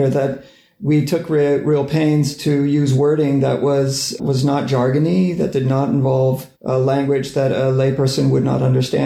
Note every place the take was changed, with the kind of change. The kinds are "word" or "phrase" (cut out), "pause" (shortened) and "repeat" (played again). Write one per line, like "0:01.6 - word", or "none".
0:04.2 - word
0:06.6 - pause